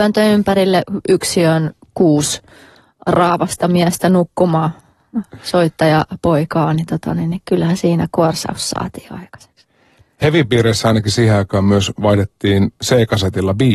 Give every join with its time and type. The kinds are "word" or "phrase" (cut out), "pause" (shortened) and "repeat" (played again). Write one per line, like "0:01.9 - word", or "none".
none

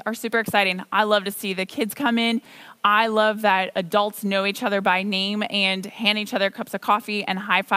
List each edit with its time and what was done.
none

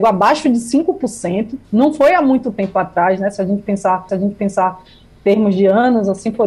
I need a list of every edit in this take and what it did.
0:04.1 - repeat

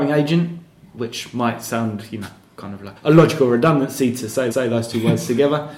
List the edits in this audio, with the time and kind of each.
0:03.0 - word
0:04.5 - repeat

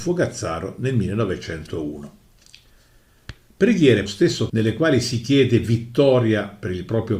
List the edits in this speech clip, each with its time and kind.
0:04.1 - phrase
0:04.5 - word

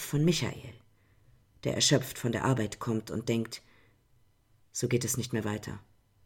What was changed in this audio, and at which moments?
none

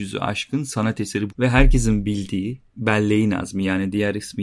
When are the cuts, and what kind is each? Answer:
0:01.3 - word

